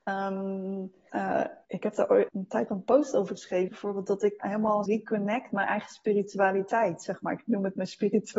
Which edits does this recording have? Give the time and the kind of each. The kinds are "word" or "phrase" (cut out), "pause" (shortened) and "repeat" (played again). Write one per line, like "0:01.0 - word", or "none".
0:01.1 - word
0:01.6 - word
0:02.3 - word
0:02.7 - word
0:03.7 - word
0:04.4 - word
0:04.9 - word
0:05.5 - word